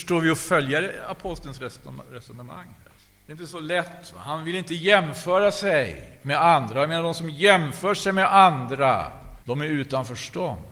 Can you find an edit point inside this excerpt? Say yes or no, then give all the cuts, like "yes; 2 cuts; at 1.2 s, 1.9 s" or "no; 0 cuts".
yes; 2 cuts; at 3.0 s, 9.4 s